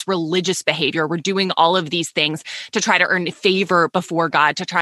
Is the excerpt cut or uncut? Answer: uncut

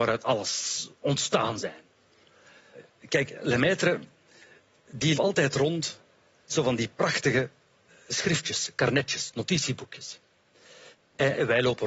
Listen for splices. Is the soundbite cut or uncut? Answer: cut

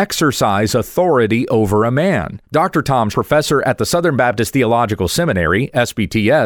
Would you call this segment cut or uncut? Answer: cut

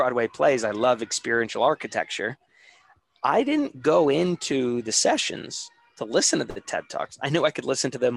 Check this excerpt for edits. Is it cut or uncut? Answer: uncut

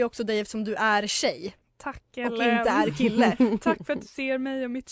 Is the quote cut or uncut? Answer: cut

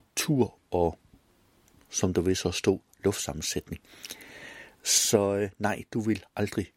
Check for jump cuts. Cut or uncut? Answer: uncut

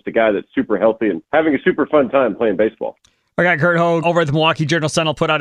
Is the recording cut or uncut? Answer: cut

